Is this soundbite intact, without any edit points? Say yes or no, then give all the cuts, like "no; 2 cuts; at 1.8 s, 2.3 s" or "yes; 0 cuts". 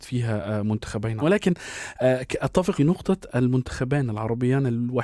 no; 2 cuts; at 1.2 s, 2.8 s